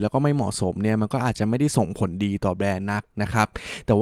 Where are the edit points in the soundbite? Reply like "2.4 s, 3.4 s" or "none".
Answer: 3.1 s